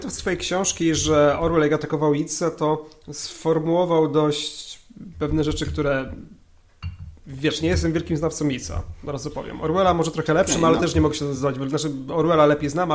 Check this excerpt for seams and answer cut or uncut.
uncut